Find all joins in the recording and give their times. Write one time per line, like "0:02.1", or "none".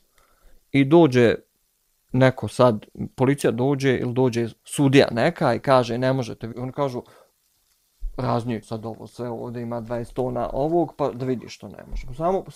0:01.7
0:04.6
0:06.5
0:08.6